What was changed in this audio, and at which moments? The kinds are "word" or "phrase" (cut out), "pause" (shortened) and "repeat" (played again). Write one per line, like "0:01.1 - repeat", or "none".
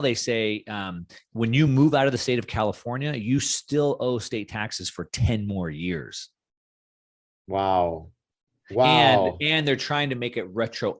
none